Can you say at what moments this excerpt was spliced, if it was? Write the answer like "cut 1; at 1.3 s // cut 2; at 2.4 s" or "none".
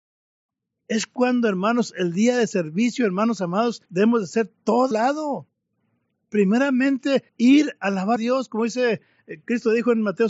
cut 1; at 3.8 s // cut 2; at 4.9 s // cut 3; at 7.3 s // cut 4; at 8.2 s